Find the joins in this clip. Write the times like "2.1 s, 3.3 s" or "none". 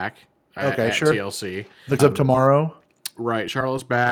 2.0 s